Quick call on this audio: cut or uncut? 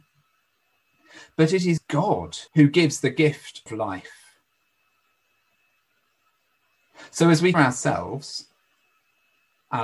cut